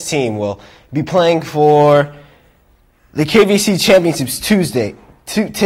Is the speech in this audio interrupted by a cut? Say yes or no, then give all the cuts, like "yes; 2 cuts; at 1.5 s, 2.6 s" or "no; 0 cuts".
no; 0 cuts